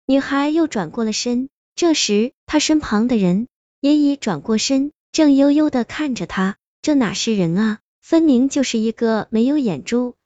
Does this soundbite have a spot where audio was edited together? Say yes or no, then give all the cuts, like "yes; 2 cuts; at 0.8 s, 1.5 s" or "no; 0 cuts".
yes; 1 cut; at 2.4 s